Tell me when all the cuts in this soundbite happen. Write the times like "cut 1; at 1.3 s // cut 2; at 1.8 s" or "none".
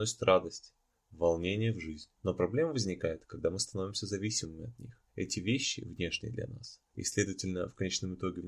cut 1; at 2.2 s // cut 2; at 5.1 s // cut 3; at 6.9 s